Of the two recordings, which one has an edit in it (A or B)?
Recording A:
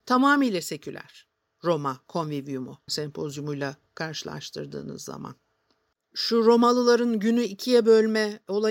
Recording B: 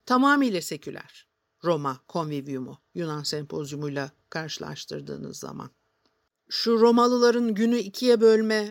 A